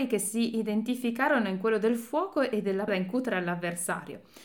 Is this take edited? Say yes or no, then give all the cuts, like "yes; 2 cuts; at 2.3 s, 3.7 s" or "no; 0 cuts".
yes; 1 cut; at 2.9 s